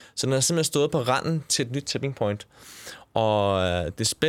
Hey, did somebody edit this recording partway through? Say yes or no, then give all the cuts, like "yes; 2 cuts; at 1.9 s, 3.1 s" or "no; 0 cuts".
no; 0 cuts